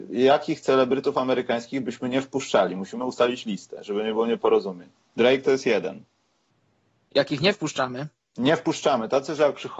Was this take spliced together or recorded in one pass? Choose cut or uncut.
uncut